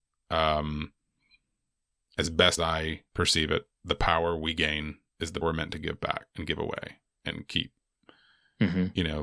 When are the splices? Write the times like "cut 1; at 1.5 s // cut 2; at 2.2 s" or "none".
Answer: cut 1; at 2.6 s // cut 2; at 3.1 s // cut 3; at 3.7 s // cut 4; at 5.1 s // cut 5; at 5.4 s // cut 6; at 6.3 s